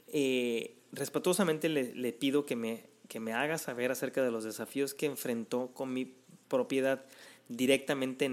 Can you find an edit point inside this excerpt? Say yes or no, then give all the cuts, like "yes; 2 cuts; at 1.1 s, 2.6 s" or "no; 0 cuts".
no; 0 cuts